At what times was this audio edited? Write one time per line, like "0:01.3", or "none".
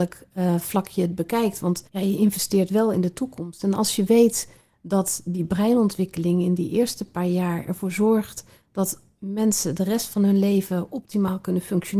0:01.9